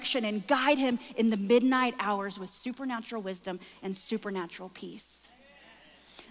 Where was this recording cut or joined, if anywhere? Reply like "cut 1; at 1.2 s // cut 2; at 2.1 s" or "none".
none

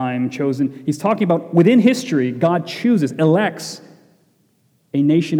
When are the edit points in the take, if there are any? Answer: none

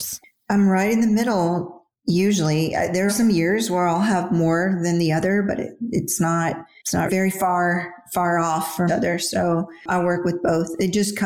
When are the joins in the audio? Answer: cut 1; at 3.1 s // cut 2; at 7.1 s // cut 3; at 8.9 s

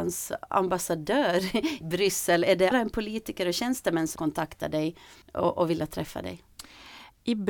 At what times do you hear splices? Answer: cut 1; at 1.8 s // cut 2; at 2.7 s // cut 3; at 4.2 s // cut 4; at 5.2 s

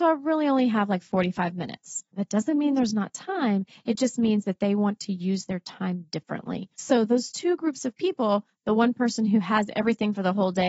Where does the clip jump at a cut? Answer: cut 1; at 2.1 s // cut 2; at 6.7 s

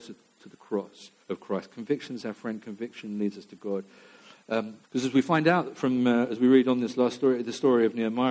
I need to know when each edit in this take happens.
cut 1; at 1.2 s // cut 2; at 4.8 s

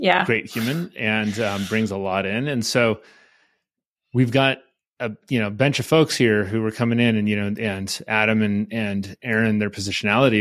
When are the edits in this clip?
none

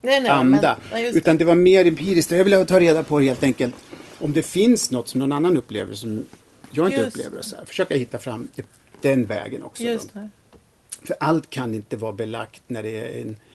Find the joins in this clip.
none

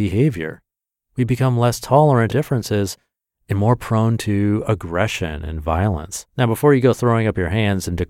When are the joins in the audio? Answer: cut 1; at 2.3 s // cut 2; at 6.3 s

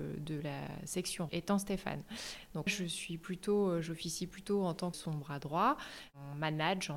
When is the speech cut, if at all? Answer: cut 1; at 1.3 s // cut 2; at 2.7 s // cut 3; at 4.9 s

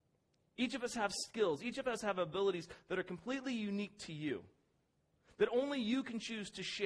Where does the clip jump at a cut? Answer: none

